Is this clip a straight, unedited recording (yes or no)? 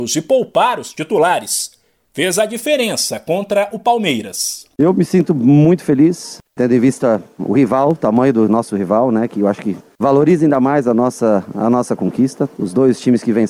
yes